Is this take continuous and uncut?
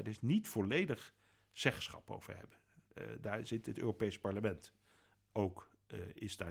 yes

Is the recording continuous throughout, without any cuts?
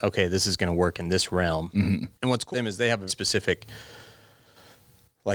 no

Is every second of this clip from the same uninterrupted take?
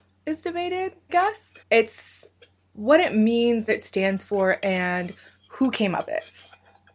no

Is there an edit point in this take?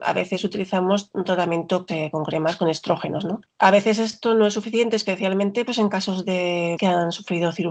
yes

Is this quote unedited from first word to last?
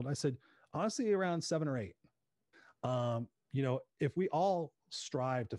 yes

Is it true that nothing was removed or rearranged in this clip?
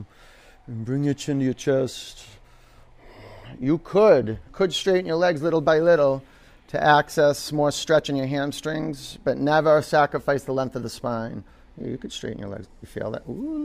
no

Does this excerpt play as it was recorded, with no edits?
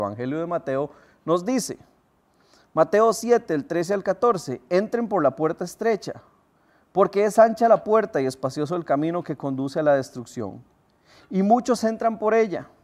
yes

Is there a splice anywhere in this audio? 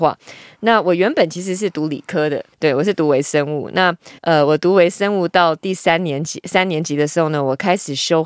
yes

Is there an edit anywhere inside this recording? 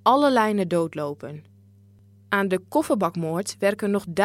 no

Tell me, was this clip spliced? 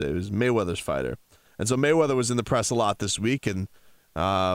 no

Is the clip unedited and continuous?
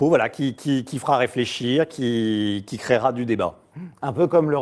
yes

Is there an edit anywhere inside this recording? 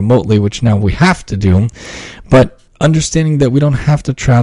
yes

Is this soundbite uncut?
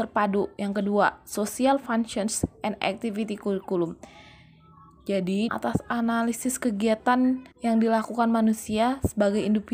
no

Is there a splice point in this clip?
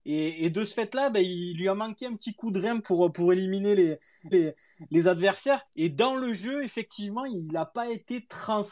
yes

